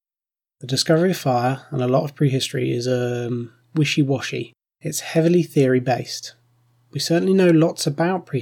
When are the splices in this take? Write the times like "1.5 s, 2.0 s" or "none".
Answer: 3.6 s, 4.6 s

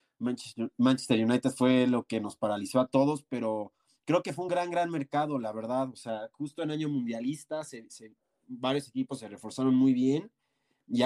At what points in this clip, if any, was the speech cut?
none

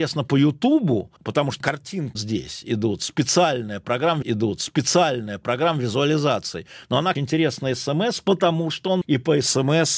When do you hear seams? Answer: 1.2 s, 1.6 s, 2.1 s, 4.2 s, 7.2 s, 9.0 s

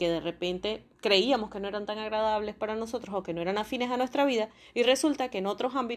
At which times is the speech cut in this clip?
0.9 s

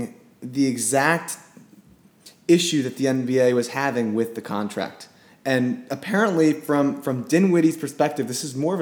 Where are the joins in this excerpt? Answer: none

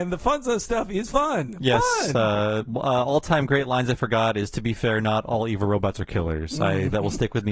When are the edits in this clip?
none

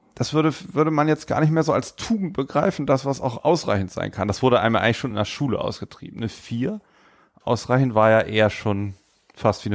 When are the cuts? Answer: none

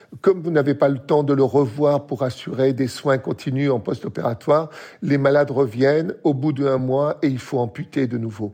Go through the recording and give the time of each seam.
none

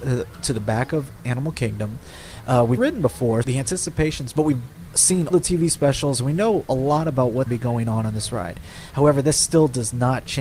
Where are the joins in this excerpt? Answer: 2.8 s, 3.4 s, 4.3 s, 5.3 s, 7.5 s

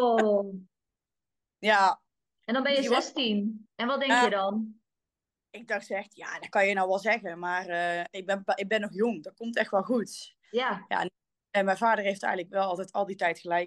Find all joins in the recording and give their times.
none

